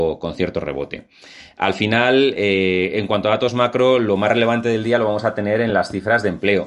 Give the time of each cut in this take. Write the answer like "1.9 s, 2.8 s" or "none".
none